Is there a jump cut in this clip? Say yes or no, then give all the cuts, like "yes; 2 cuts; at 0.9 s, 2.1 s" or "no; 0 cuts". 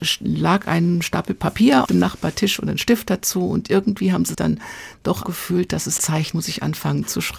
yes; 5 cuts; at 1.9 s, 4.3 s, 5.2 s, 6.0 s, 6.3 s